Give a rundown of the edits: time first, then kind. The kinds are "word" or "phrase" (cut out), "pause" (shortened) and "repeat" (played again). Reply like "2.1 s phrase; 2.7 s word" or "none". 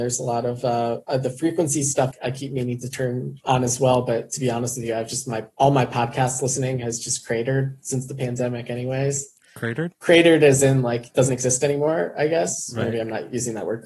2.1 s word